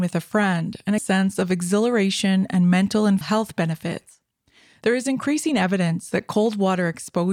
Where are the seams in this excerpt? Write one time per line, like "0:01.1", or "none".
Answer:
0:01.0
0:03.2